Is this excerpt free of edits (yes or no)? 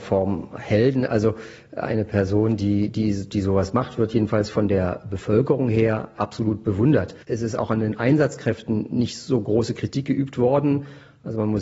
no